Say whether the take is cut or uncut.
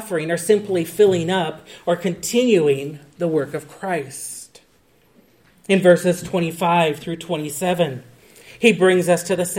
uncut